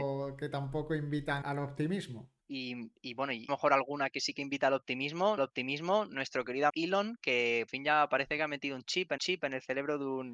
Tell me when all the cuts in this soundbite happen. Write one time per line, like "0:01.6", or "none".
0:01.4
0:02.4
0:03.5
0:05.4
0:06.7
0:07.7
0:09.2